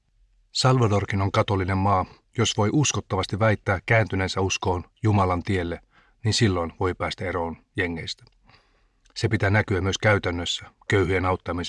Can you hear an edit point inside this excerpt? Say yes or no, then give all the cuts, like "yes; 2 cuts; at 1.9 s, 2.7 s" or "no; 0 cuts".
no; 0 cuts